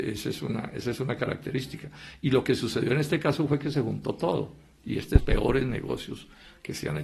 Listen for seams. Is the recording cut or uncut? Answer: cut